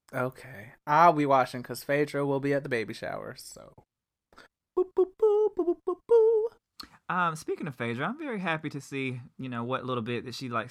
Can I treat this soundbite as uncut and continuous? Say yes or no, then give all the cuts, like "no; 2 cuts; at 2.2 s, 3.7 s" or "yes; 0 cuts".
yes; 0 cuts